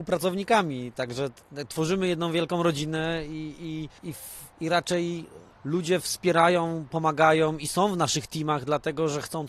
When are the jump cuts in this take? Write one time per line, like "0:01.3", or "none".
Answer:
0:04.0
0:04.5
0:05.5